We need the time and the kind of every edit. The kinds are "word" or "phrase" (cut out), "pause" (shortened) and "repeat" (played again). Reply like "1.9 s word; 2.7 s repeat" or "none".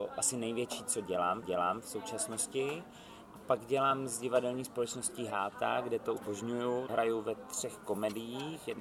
1.4 s repeat; 6.2 s word; 6.9 s word